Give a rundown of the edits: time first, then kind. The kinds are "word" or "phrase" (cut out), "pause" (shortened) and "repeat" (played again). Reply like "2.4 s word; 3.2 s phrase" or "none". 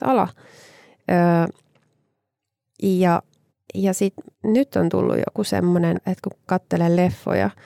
3.5 s pause; 4.3 s pause; 5.9 s word; 6.5 s word